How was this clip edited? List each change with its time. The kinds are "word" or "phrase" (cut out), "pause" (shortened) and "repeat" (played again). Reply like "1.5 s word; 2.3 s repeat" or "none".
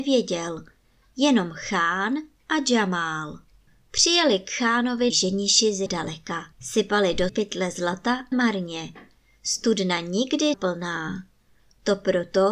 3.7 s pause; 5.1 s word; 5.9 s word; 6.5 s pause; 7.3 s word; 8.3 s word; 10.5 s word